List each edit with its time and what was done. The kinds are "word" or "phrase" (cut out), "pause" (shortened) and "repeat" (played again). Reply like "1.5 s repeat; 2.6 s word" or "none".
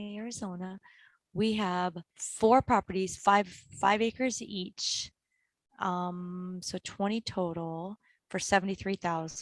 none